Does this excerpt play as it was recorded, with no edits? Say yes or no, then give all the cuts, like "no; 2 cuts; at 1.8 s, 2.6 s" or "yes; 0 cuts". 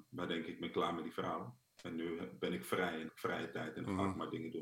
no; 1 cut; at 3.1 s